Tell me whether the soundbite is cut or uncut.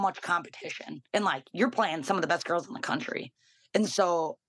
cut